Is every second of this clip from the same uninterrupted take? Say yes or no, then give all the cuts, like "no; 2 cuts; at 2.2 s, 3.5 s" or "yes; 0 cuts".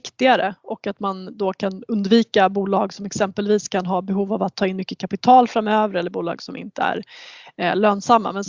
yes; 0 cuts